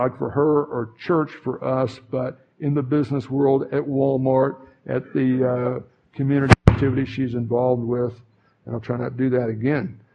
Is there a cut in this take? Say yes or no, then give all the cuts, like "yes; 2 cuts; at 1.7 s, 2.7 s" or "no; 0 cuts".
no; 0 cuts